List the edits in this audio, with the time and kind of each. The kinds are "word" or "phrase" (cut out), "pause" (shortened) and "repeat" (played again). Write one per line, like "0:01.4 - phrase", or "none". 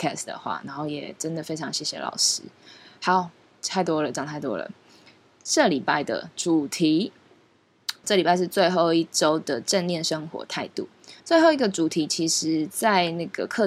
0:08.0 - word
0:11.2 - pause